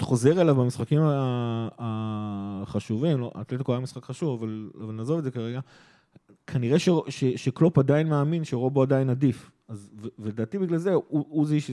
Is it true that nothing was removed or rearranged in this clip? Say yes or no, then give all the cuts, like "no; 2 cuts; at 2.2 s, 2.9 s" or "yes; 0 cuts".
yes; 0 cuts